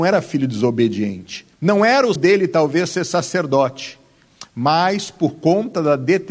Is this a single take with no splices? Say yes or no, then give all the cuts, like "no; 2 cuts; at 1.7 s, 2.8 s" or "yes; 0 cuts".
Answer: no; 2 cuts; at 1.5 s, 2.2 s